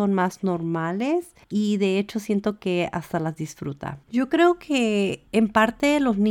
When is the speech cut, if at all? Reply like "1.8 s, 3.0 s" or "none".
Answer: 1.4 s, 4.0 s, 5.3 s